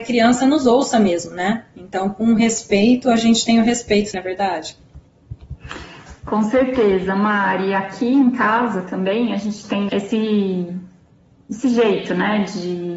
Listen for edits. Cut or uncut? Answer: cut